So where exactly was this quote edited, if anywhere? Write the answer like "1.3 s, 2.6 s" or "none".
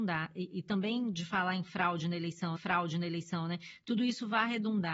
2.6 s